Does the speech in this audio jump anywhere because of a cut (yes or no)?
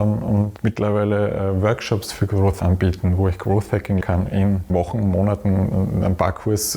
yes